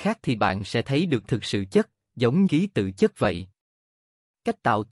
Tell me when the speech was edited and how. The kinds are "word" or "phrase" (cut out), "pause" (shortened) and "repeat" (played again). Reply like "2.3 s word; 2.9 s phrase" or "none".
1.2 s word; 2.5 s word

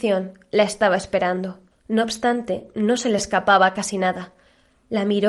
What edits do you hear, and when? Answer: none

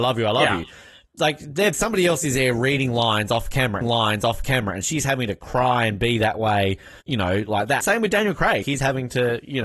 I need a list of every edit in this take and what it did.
1.7 s word; 3.8 s repeat; 7.0 s pause; 7.8 s word; 8.6 s word

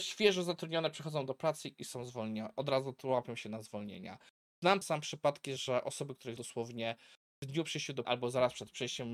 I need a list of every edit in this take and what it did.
4.8 s word; 5.6 s word; 6.4 s word; 8.0 s word

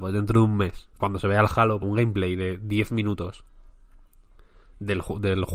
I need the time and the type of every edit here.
0.9 s pause; 1.8 s word

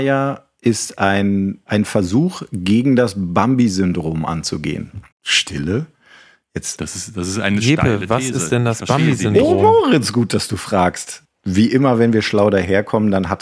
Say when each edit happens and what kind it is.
5.1 s pause

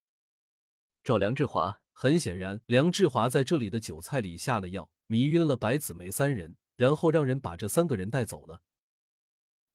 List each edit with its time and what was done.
1.9 s pause; 2.6 s pause; 5.0 s pause; 6.6 s pause

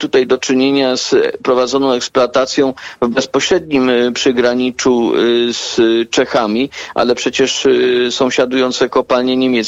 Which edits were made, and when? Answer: none

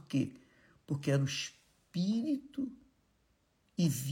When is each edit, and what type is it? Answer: none

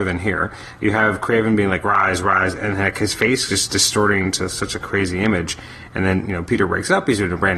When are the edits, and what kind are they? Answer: none

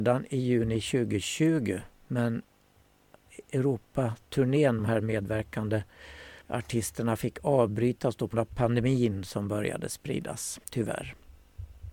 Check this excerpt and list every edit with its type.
4.8 s phrase; 6.4 s pause; 8.3 s word; 10.6 s pause

